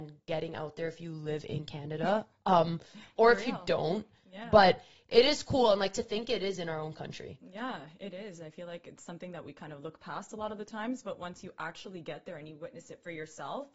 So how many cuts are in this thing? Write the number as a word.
zero